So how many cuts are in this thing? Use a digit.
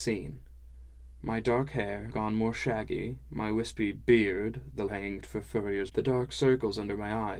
4